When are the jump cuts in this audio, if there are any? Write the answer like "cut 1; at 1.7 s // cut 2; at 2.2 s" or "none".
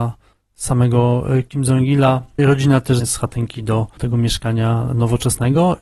cut 1; at 2.4 s // cut 2; at 3.0 s // cut 3; at 4.0 s